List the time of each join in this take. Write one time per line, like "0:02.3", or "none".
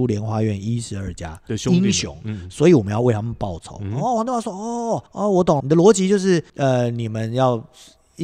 0:05.1
0:05.6
0:06.5